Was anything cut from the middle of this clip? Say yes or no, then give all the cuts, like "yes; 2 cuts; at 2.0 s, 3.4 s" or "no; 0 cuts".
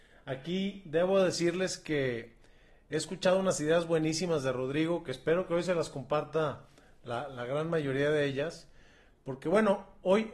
no; 0 cuts